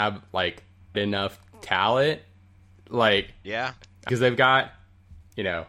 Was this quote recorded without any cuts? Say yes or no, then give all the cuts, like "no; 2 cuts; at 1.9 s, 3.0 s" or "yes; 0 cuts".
no; 3 cuts; at 0.9 s, 3.4 s, 4.1 s